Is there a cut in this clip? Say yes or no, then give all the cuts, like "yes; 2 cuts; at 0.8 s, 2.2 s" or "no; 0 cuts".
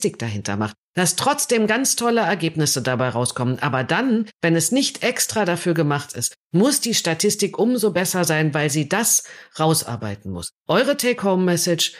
yes; 1 cut; at 10.6 s